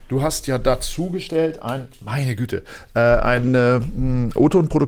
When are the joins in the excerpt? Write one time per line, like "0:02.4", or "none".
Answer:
none